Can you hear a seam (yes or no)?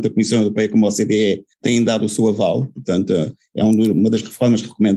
yes